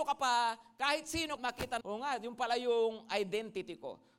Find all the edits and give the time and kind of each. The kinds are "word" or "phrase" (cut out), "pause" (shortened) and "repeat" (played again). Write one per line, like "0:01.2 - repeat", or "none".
0:01.4 - phrase
0:01.8 - word